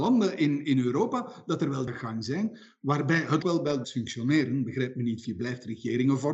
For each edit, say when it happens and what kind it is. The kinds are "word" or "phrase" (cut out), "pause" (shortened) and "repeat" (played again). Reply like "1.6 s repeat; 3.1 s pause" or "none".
1.9 s phrase; 3.4 s word; 3.8 s word; 5.2 s word